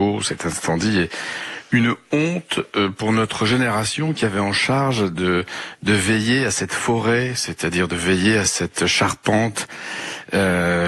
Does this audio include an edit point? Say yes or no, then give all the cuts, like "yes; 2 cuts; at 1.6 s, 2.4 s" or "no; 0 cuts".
no; 0 cuts